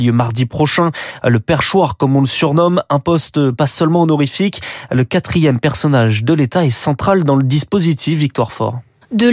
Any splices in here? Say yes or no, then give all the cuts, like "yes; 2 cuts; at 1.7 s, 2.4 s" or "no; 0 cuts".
no; 0 cuts